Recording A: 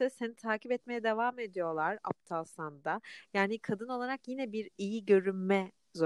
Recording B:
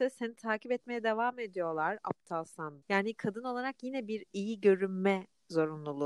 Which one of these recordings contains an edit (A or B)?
B